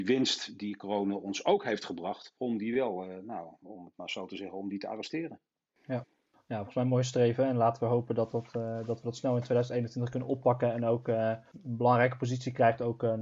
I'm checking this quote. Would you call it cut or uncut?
uncut